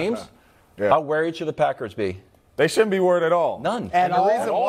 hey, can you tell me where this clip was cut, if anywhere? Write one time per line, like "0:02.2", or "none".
none